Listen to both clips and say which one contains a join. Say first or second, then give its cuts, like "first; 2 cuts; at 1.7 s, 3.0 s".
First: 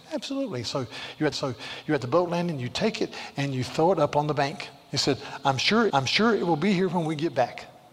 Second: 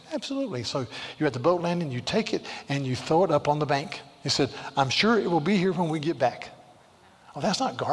first; 2 cuts; at 1.3 s, 5.9 s